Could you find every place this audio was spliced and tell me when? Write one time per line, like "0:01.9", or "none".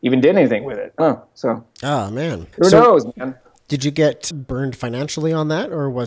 0:01.0
0:01.7
0:02.5
0:04.3